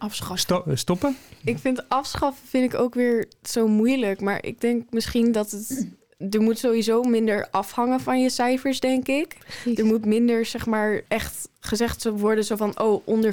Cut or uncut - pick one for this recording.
cut